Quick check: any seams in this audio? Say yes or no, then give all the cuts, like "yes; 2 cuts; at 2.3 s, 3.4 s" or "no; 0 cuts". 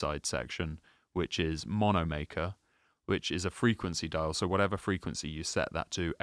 no; 0 cuts